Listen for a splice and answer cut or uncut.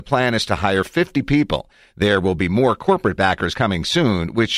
uncut